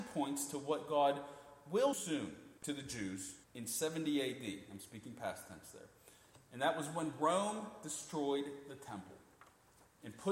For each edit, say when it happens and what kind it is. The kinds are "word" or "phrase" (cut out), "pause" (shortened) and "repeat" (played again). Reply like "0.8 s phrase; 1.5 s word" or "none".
1.9 s word; 2.6 s pause; 3.4 s pause